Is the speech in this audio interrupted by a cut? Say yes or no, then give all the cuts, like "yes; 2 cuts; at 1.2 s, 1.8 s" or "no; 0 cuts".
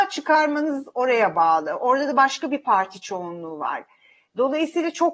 no; 0 cuts